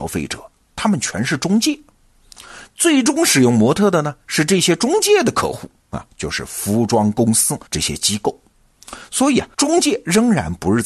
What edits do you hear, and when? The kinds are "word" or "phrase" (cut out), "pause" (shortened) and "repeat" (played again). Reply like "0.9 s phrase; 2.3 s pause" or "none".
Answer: 7.7 s pause; 9.5 s pause